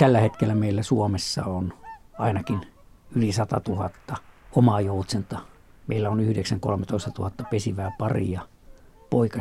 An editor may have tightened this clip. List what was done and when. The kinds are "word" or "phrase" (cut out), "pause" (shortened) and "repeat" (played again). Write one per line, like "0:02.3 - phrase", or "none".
none